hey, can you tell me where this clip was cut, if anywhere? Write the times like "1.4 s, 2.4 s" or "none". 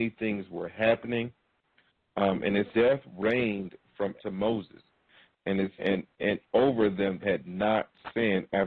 2.7 s, 4.2 s, 5.8 s, 6.4 s, 7.2 s